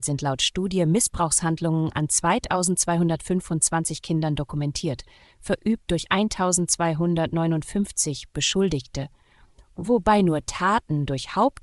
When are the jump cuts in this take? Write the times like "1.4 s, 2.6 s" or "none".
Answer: none